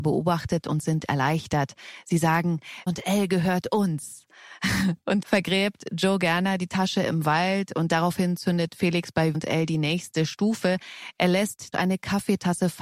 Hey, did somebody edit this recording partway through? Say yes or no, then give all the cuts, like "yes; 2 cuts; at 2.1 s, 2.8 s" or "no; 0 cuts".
yes; 4 cuts; at 2.9 s, 5.2 s, 9.3 s, 11.7 s